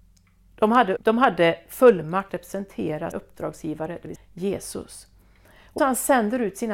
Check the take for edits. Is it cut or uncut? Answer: cut